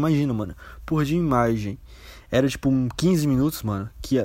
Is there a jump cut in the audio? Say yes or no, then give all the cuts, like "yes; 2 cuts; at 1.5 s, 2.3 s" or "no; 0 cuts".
no; 0 cuts